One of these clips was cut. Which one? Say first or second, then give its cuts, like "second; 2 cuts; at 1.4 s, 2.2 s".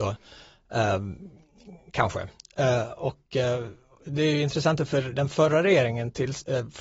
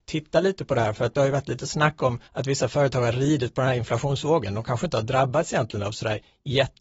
second; 1 cut; at 2.3 s